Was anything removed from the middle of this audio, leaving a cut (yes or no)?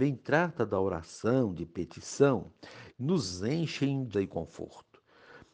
yes